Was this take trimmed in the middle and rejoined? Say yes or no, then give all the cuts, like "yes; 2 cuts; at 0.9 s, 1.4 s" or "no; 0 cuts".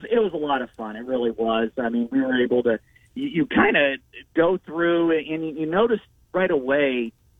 no; 0 cuts